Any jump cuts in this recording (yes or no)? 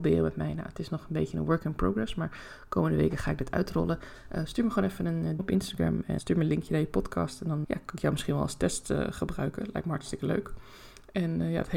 yes